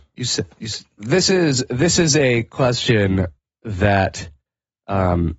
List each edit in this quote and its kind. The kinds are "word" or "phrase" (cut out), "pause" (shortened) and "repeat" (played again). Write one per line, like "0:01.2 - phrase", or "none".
none